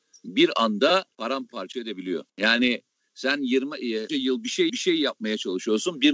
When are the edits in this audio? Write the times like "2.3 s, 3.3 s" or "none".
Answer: 1.1 s, 2.3 s, 4.1 s, 4.7 s